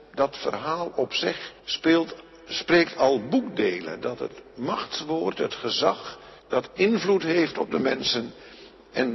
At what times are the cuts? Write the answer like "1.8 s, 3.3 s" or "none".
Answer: 1.6 s, 6.4 s